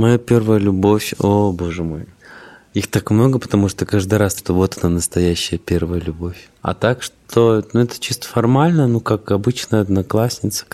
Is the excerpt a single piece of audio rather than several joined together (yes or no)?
no